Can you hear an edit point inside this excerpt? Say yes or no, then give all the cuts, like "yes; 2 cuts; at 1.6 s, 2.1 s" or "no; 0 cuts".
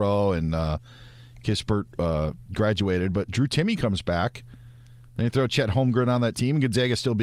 no; 0 cuts